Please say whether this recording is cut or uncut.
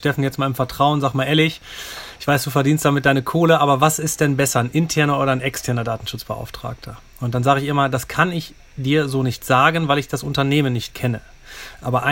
uncut